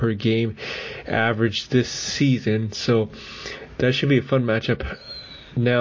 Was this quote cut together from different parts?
no; 0 cuts

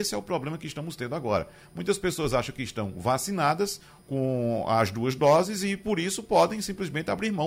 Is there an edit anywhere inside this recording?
no; 0 cuts

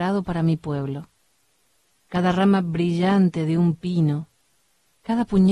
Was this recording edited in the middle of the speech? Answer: no; 0 cuts

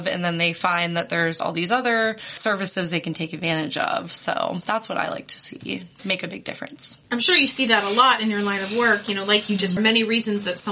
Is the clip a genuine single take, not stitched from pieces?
no; 2 cuts; at 7.1 s, 9.8 s

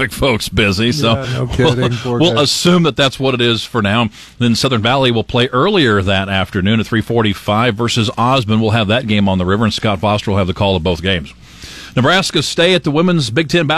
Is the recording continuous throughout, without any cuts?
yes; 0 cuts

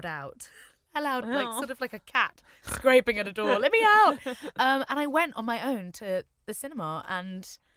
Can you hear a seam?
yes; 1 cut; at 1.2 s

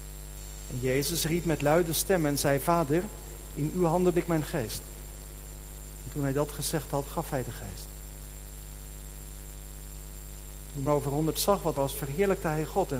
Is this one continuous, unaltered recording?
no; 3 cuts; at 4.1 s, 10.9 s, 11.7 s

